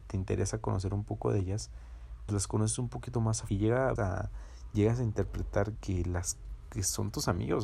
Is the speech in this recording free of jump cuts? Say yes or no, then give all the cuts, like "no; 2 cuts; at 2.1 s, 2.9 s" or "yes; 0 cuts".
no; 4 cuts; at 2.3 s, 3.5 s, 4.0 s, 5.8 s